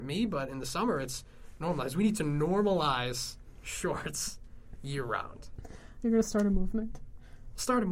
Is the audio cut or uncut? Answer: uncut